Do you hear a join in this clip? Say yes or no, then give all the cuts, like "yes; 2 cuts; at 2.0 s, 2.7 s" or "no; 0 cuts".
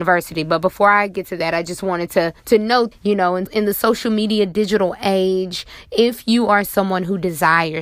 yes; 3 cuts; at 2.4 s, 2.9 s, 3.5 s